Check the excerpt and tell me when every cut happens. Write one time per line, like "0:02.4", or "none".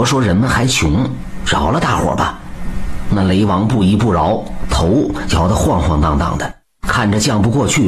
0:06.6